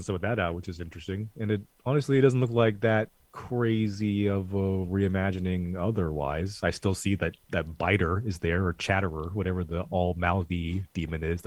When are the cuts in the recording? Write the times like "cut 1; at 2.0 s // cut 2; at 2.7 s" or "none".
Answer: cut 1; at 7.4 s